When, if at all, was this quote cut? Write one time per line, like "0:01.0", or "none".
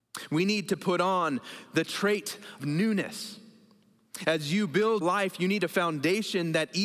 0:02.6
0:05.0